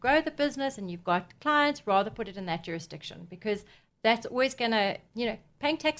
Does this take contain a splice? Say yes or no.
no